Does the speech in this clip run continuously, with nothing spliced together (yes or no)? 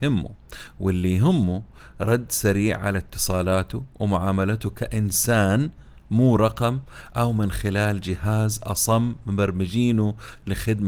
yes